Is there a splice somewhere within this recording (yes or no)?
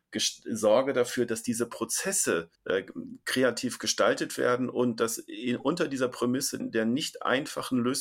yes